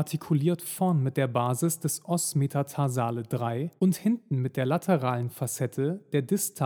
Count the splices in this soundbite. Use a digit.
1